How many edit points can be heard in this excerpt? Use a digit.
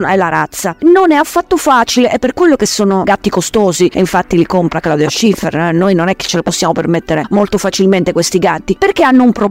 0